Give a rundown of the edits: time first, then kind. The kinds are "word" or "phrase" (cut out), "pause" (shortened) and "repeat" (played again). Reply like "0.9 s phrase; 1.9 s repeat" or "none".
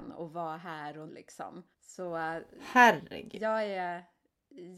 1.1 s word; 1.7 s pause